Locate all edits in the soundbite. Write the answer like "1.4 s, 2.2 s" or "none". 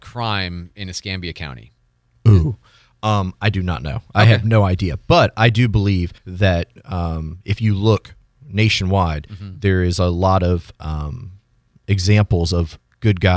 6.2 s